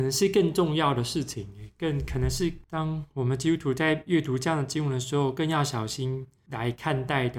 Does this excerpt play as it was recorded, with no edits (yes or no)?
no